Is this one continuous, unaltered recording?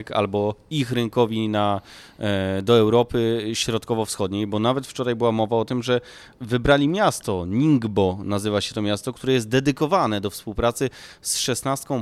yes; 0 cuts

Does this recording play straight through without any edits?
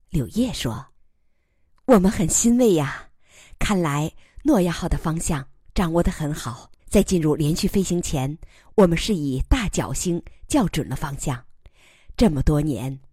no; 2 cuts; at 0.9 s, 6.8 s

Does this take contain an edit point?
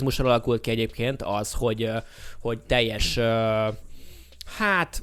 no; 0 cuts

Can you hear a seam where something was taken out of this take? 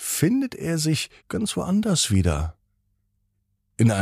yes; 1 cut; at 1.2 s

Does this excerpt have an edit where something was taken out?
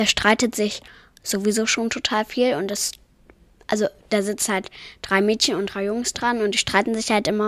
no; 0 cuts

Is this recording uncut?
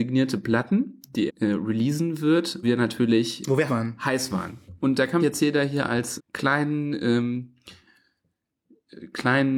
no; 5 cuts; at 1.3 s, 2.6 s, 3.7 s, 5.2 s, 6.2 s

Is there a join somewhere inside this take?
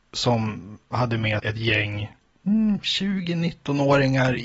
yes; 1 cut; at 1.4 s

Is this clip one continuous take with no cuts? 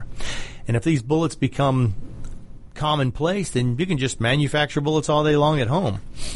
yes; 0 cuts

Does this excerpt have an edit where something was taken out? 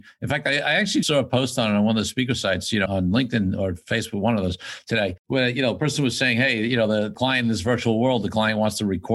yes; 2 cuts; at 1.0 s, 2.9 s

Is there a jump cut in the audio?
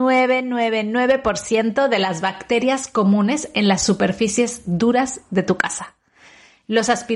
no; 0 cuts

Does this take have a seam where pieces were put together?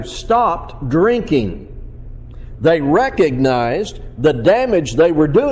no; 0 cuts

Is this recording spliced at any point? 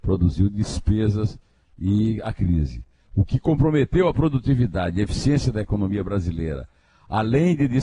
no; 0 cuts

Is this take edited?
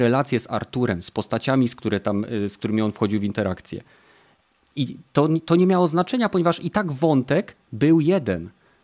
no; 0 cuts

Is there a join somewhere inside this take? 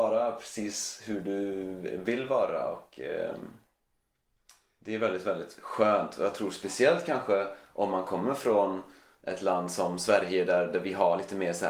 no; 0 cuts

